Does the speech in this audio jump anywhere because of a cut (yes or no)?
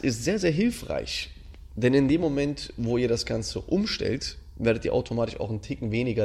no